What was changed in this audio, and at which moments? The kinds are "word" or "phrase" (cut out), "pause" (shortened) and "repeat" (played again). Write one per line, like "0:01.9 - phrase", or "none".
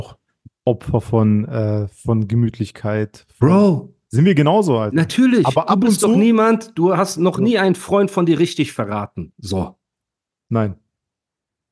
none